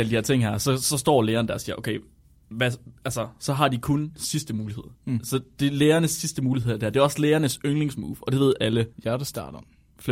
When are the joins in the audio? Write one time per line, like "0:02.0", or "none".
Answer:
0:04.9
0:08.9